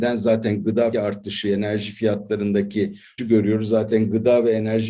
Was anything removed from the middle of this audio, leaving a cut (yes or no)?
yes